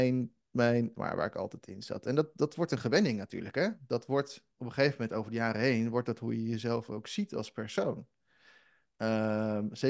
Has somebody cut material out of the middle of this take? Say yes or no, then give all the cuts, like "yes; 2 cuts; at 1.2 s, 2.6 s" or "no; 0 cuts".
yes; 3 cuts; at 0.9 s, 2.3 s, 4.5 s